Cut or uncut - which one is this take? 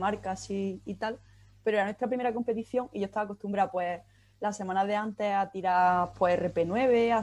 uncut